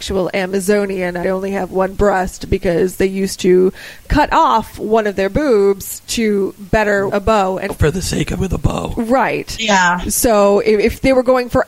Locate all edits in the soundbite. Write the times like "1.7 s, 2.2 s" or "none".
1.2 s, 7.1 s, 7.7 s, 8.4 s